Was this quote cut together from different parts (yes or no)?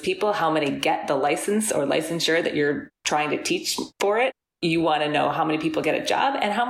no